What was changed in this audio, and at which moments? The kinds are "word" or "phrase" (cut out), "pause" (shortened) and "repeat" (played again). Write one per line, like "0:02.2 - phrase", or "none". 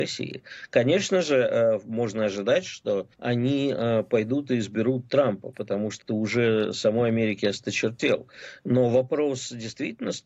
0:03.1 - pause
0:06.0 - word